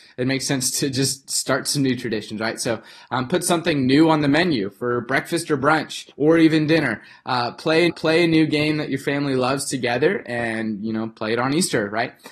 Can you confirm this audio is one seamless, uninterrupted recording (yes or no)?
no